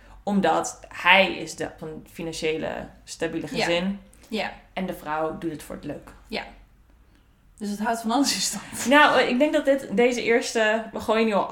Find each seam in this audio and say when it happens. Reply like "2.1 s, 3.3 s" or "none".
1.8 s